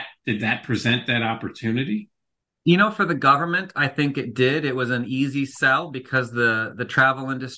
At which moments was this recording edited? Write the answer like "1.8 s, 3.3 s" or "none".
none